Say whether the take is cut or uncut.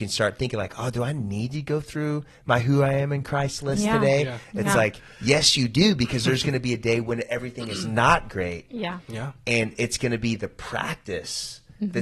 uncut